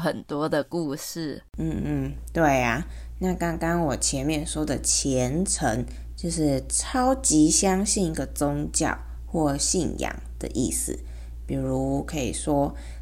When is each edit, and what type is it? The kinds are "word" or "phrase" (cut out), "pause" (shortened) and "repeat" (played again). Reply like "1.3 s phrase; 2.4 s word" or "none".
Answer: 1.5 s pause

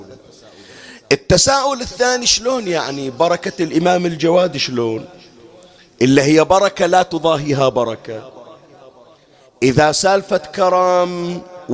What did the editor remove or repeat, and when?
none

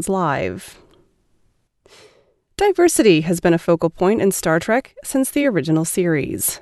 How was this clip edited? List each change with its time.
none

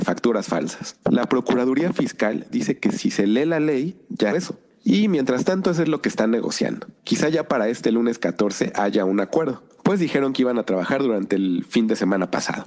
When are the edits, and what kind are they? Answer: 4.3 s phrase; 7.0 s pause

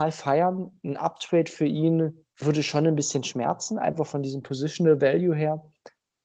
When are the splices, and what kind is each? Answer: 2.3 s pause

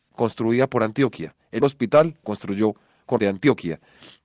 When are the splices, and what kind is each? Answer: 1.6 s word; 2.2 s word; 3.2 s word

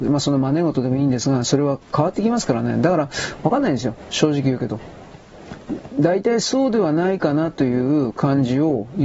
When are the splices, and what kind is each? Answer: 1.8 s pause

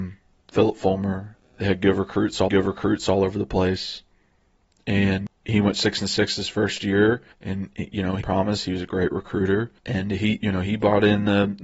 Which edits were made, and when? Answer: 2.5 s repeat; 7.3 s pause; 8.2 s word; 9.8 s pause

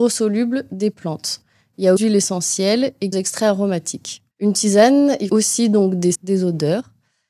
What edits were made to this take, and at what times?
2.0 s phrase; 3.1 s word; 4.3 s pause; 5.3 s word; 6.1 s word

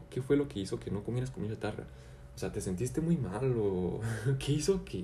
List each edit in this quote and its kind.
none

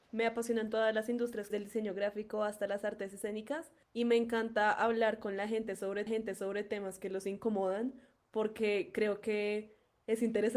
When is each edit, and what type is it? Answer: 1.5 s phrase; 3.8 s pause; 6.1 s repeat

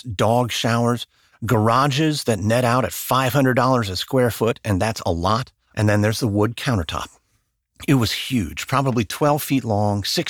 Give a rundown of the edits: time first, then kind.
none

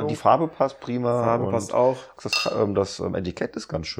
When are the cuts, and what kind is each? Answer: none

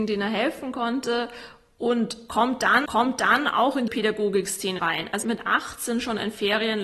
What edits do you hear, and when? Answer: 2.9 s repeat; 3.9 s word; 4.8 s word; 5.2 s word

